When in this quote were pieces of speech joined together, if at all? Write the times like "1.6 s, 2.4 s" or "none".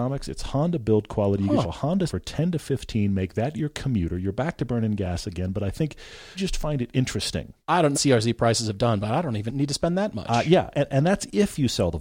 1.6 s, 2.1 s, 6.3 s, 7.6 s, 7.9 s, 9.5 s, 10.7 s